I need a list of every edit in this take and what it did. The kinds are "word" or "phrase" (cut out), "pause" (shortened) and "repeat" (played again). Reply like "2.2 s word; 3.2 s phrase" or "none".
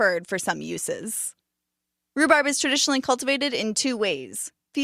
none